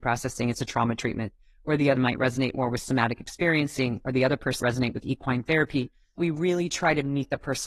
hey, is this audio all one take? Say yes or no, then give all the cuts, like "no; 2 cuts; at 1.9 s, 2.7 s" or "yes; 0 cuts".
no; 3 cuts; at 2.0 s, 4.6 s, 6.2 s